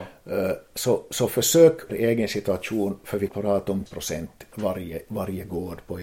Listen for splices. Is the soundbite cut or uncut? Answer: cut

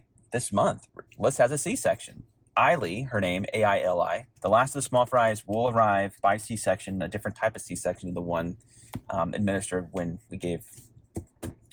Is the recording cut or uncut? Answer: cut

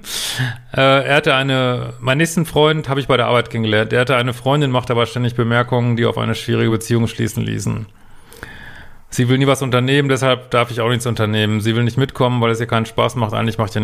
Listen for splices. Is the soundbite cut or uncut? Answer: uncut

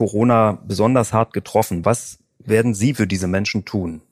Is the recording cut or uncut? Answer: uncut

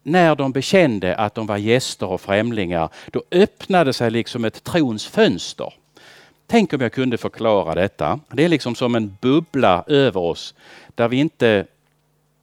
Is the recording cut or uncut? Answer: cut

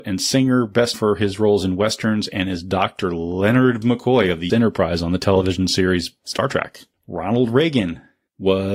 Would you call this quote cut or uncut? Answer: cut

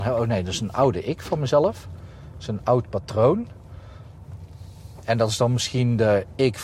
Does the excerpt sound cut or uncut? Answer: uncut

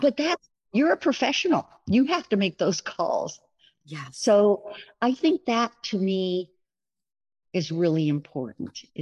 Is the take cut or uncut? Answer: uncut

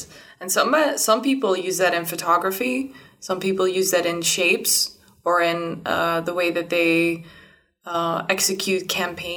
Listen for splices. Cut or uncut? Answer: uncut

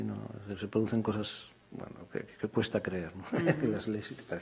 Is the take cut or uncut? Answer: uncut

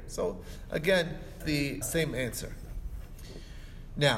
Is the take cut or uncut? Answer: cut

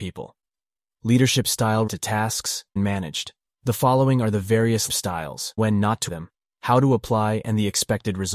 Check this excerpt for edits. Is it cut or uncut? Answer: cut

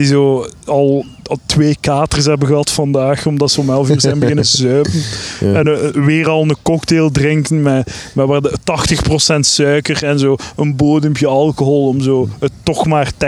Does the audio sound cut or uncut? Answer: uncut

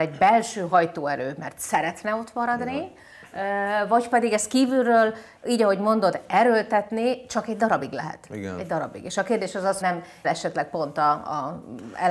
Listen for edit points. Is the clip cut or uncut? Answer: cut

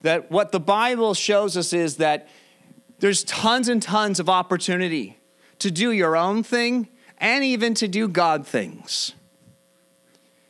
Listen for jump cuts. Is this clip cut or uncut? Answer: uncut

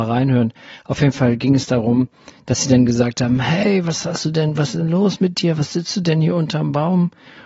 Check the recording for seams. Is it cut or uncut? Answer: uncut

